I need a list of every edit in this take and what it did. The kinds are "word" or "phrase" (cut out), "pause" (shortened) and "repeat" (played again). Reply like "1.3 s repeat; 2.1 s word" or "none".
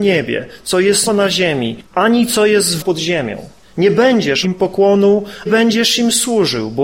1.1 s word; 1.9 s pause; 2.8 s phrase; 3.6 s pause; 4.4 s word; 5.5 s phrase

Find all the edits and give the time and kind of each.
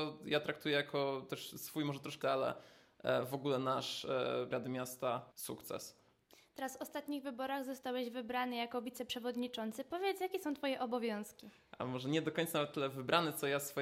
2.2 s word; 4.5 s word; 5.3 s pause

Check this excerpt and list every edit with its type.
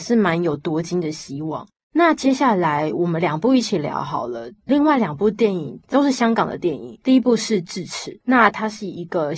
8.2 s pause

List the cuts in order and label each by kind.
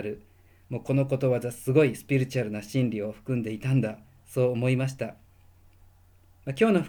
none

